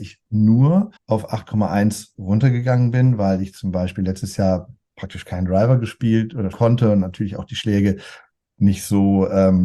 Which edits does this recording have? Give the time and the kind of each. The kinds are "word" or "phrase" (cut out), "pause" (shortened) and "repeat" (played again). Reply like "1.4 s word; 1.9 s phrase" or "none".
1.0 s pause; 6.5 s word

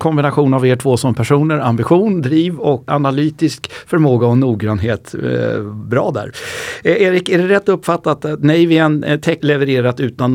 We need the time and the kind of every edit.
2.9 s word; 9.4 s word

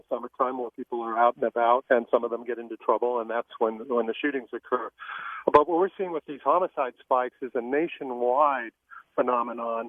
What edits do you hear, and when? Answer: 1.8 s word

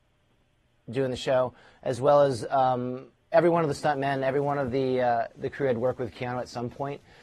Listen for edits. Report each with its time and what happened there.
none

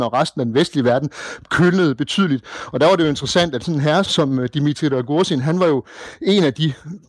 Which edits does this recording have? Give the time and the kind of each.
4.0 s word

